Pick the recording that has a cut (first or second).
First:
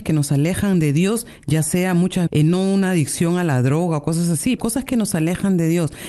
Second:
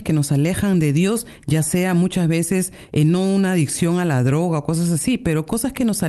first